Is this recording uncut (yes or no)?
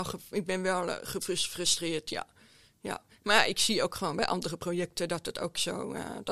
yes